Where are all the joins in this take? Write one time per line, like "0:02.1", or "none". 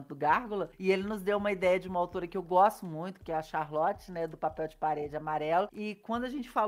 none